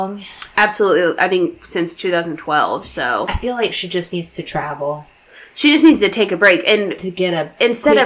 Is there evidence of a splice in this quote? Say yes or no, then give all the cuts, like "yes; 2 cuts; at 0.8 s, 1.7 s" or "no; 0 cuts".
no; 0 cuts